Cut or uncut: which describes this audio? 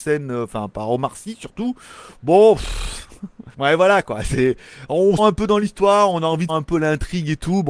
cut